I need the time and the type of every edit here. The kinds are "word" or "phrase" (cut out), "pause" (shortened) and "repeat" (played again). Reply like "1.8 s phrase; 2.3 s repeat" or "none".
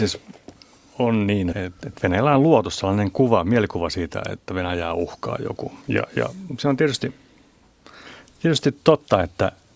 1.5 s word; 5.8 s pause

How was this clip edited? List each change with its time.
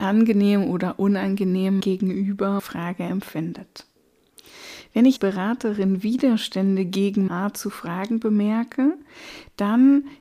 1.8 s word; 2.6 s word; 5.2 s word; 7.3 s word

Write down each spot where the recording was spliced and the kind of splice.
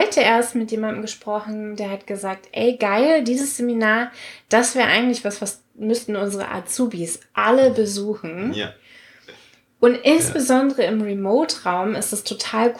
none

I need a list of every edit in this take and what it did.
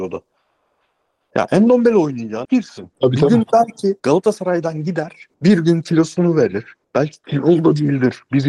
2.4 s word; 2.9 s pause; 4.0 s pause; 5.3 s pause; 6.8 s pause

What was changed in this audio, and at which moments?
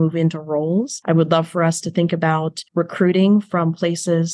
2.7 s pause

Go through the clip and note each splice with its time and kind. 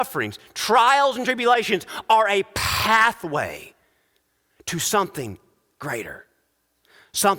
none

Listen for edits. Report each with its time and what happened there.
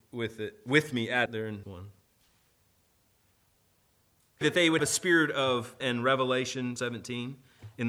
1.3 s word; 1.6 s word; 4.4 s word; 4.8 s word; 5.8 s word; 6.8 s word

